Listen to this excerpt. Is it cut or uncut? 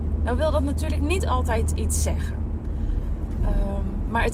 uncut